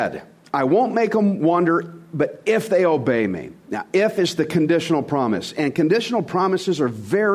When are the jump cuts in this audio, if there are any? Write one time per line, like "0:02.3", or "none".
none